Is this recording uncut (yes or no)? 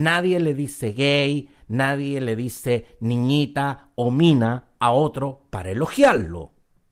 yes